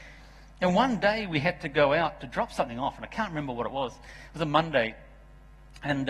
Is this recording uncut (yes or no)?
yes